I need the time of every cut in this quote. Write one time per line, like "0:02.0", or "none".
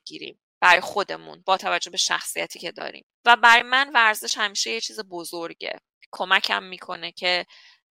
0:03.1

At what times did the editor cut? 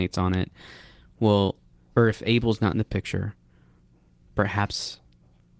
0:01.9

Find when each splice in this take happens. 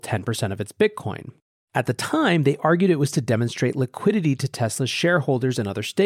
none

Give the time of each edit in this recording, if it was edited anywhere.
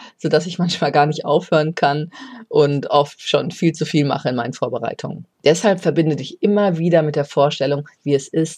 0:05.3

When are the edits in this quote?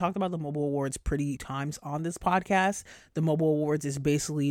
0:01.4

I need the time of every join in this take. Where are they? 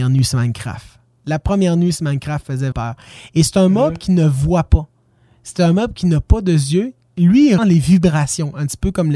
0:02.7
0:07.6

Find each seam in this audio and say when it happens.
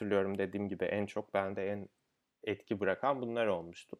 none

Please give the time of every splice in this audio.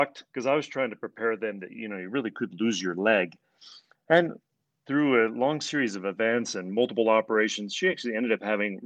none

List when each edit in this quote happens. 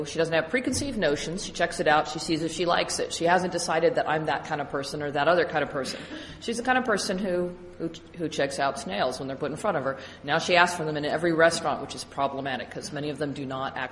none

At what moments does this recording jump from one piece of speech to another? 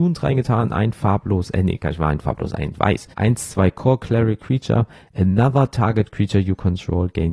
0:03.1

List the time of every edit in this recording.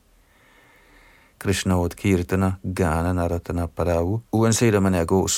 0:04.3

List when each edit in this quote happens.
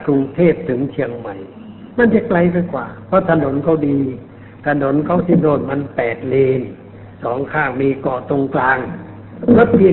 0:01.9
0:07.1

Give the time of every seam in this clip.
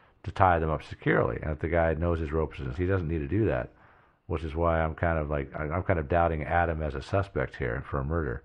0:02.8

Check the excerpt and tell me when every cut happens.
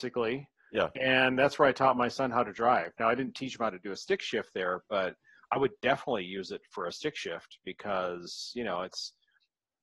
none

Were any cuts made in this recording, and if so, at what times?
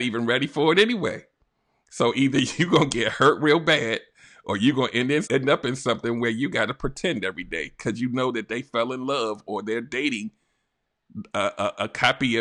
0:05.2

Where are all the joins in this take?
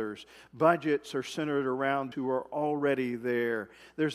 0:02.1

